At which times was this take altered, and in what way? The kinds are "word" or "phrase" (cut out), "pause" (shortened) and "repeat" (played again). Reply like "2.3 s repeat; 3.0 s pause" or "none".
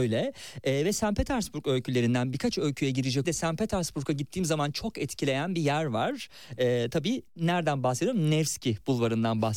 3.2 s phrase; 7.3 s pause